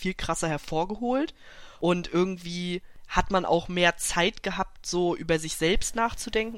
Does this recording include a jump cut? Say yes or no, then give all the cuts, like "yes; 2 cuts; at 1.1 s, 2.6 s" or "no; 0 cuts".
no; 0 cuts